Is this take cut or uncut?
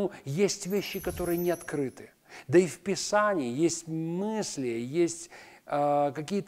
uncut